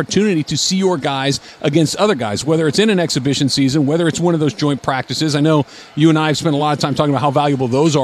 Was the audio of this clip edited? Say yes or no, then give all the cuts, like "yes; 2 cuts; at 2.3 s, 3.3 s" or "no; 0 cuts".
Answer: no; 0 cuts